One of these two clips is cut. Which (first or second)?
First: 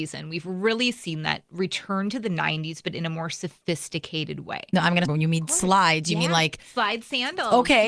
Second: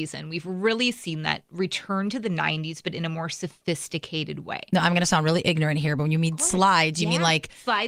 first